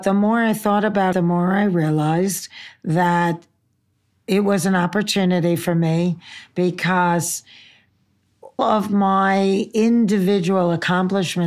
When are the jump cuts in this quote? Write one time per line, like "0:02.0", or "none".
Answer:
0:01.1
0:08.6